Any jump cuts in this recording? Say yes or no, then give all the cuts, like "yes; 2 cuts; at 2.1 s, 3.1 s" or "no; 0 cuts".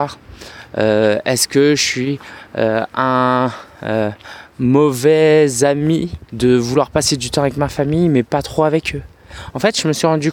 yes; 1 cut; at 6.3 s